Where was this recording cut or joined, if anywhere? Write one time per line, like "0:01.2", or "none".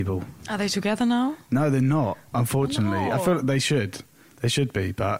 none